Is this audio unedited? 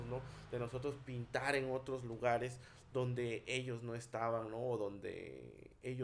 yes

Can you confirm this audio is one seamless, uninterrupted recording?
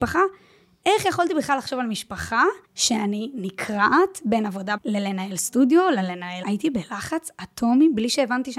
no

